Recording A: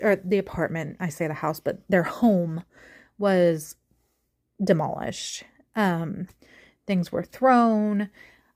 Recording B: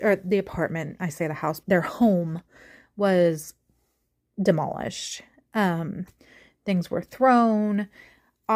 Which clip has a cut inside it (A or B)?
B